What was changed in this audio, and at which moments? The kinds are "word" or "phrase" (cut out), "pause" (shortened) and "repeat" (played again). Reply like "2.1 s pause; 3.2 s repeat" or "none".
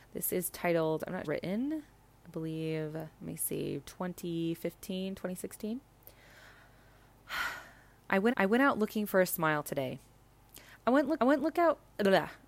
1.2 s phrase; 3.1 s pause; 8.3 s repeat; 11.2 s repeat